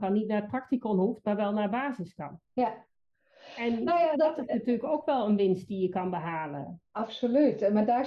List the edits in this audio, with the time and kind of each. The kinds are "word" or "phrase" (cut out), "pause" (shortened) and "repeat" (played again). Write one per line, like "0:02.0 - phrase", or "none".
0:02.5 - pause
0:04.1 - word